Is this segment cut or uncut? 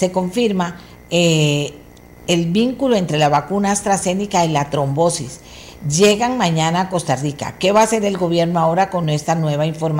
uncut